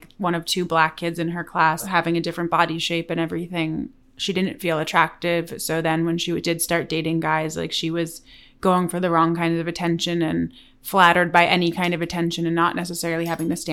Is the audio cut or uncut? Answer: uncut